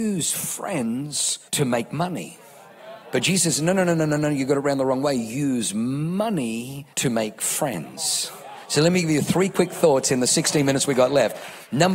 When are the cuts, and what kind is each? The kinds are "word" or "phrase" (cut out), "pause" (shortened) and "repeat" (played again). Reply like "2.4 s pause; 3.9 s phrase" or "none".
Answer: 1.5 s pause; 3.0 s pause; 6.9 s pause